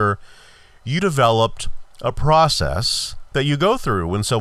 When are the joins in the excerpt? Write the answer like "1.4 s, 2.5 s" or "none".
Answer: 1.0 s, 1.9 s